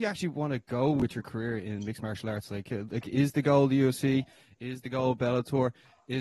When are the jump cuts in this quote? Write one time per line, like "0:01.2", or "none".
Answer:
none